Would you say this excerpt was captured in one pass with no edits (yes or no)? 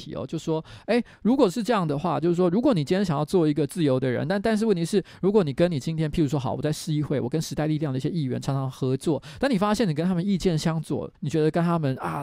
no